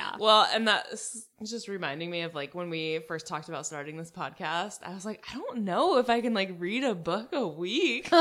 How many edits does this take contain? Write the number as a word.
one